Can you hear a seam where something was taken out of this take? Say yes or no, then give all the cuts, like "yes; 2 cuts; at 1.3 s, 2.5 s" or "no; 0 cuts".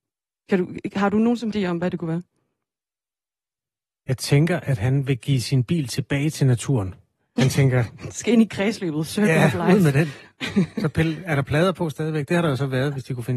yes; 1 cut; at 1.5 s